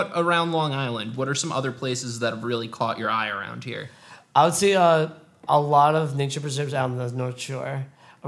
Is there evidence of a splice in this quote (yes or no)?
no